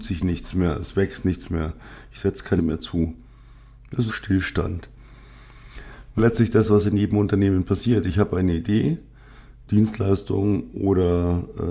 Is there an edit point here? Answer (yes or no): yes